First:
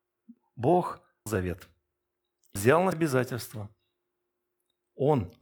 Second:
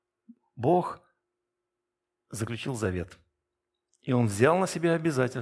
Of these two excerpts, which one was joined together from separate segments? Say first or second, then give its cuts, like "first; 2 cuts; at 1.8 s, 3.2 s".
first; 3 cuts; at 1.3 s, 2.6 s, 2.9 s